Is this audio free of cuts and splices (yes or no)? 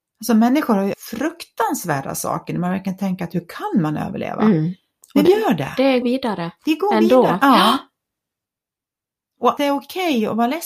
no